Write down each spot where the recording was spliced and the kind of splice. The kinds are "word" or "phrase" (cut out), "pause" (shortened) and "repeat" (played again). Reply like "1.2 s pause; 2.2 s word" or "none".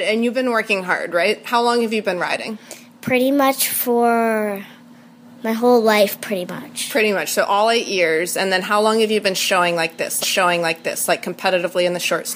10.2 s repeat